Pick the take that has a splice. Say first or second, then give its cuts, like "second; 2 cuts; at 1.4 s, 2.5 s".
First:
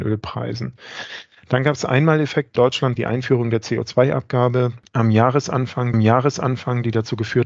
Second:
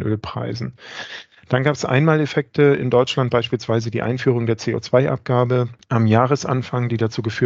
first; 3 cuts; at 2.6 s, 3.0 s, 5.9 s